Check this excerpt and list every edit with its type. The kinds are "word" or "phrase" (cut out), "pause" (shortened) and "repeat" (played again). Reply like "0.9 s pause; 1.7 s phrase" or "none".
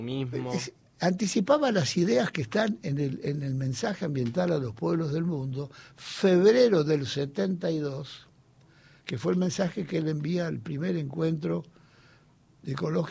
none